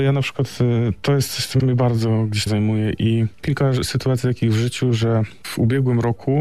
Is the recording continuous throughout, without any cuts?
no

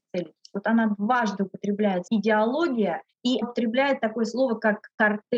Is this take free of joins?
no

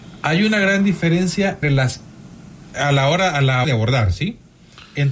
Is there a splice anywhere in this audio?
yes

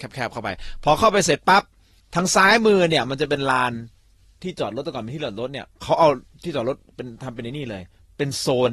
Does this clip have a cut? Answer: no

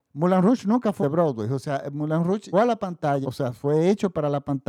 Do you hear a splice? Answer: yes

